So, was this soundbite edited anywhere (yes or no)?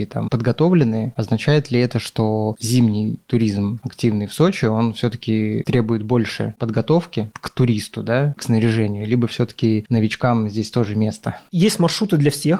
yes